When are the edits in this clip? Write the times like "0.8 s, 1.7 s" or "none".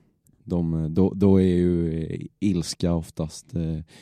none